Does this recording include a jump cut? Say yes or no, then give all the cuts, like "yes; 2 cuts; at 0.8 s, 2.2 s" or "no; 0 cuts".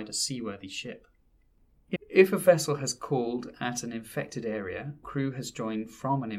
yes; 2 cuts; at 2.0 s, 5.0 s